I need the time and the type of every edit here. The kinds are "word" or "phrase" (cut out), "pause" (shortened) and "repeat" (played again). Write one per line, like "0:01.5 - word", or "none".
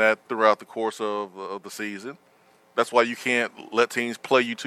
none